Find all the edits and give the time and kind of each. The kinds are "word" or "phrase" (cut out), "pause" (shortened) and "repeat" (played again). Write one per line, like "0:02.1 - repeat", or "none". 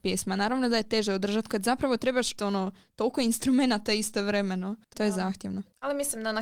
0:01.5 - word
0:02.4 - word
0:04.9 - word